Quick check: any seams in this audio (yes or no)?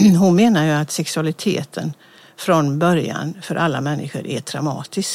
no